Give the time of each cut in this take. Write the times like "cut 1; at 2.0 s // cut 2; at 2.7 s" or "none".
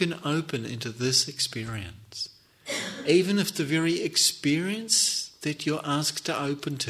none